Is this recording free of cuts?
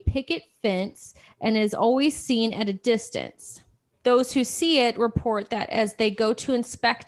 yes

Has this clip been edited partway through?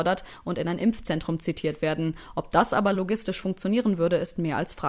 no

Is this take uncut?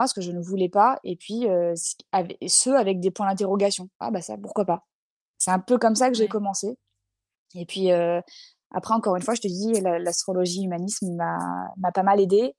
yes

